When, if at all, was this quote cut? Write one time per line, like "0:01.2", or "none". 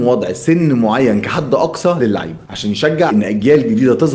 0:02.0
0:03.1